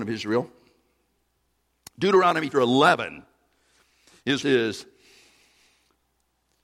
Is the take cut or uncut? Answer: cut